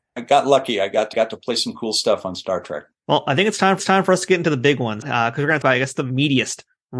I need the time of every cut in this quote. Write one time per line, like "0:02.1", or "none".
0:01.1
0:02.9
0:03.8
0:05.0
0:05.6